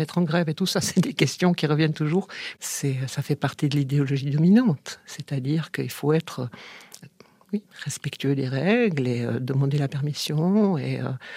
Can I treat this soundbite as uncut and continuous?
yes; 0 cuts

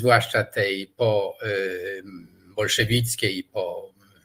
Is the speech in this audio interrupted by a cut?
no; 0 cuts

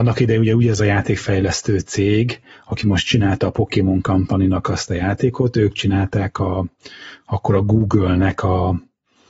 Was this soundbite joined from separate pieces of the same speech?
no; 0 cuts

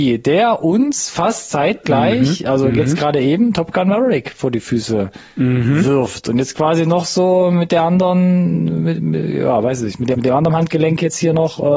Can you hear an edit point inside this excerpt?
yes; 1 cut; at 10.1 s

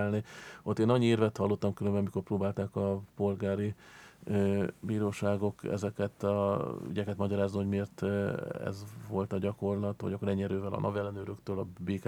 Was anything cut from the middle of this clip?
no; 0 cuts

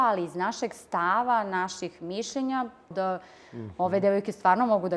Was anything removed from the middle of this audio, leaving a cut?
yes; 1 cut; at 2.9 s

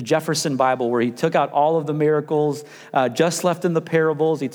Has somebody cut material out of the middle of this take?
no; 0 cuts

